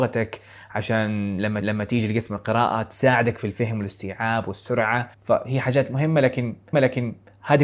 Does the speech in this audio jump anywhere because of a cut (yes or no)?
yes